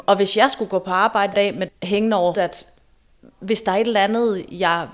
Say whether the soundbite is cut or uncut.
cut